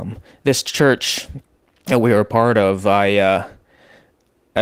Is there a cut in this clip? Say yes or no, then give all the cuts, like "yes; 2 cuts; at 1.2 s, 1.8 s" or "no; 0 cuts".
no; 0 cuts